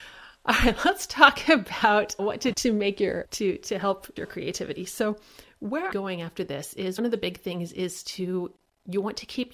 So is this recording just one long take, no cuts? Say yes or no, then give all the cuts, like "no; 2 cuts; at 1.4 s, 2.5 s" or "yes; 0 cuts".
no; 6 cuts; at 2.2 s, 2.5 s, 3.2 s, 4.2 s, 5.9 s, 7.0 s